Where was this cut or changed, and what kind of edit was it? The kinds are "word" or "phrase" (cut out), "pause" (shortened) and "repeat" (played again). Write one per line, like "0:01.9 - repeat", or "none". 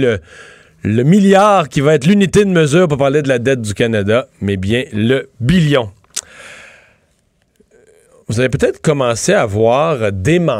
none

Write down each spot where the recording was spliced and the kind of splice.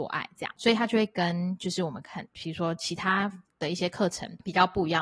0:02.3 - word

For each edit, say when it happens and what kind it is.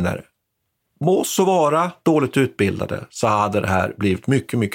none

